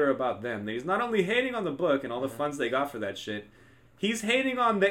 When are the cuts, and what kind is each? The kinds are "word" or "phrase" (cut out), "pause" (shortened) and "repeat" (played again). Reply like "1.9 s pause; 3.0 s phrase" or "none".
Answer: none